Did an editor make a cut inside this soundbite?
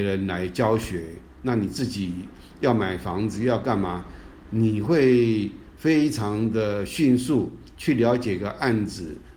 yes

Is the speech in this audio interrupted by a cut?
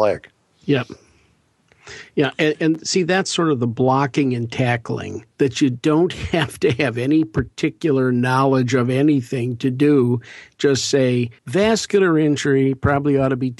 yes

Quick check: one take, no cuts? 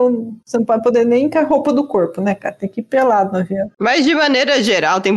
yes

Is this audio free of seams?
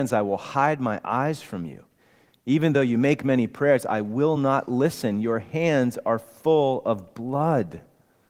yes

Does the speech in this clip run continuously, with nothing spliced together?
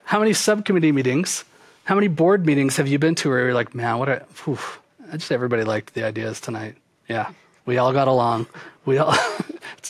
yes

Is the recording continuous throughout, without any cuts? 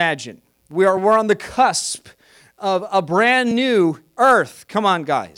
yes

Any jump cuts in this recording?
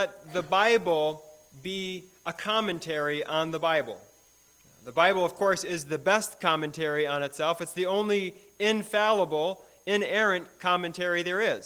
no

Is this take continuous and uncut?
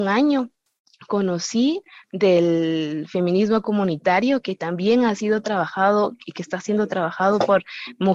yes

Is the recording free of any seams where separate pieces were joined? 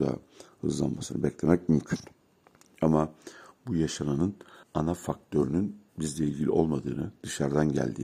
no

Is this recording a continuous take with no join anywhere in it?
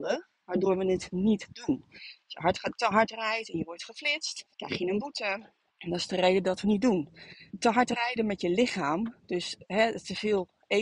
no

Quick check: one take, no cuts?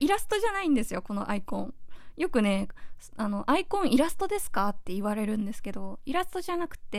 yes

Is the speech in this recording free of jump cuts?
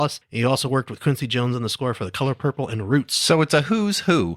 yes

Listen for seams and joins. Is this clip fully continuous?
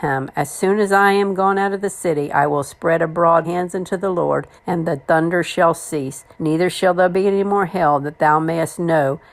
no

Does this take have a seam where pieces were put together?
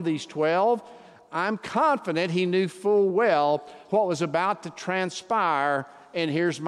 no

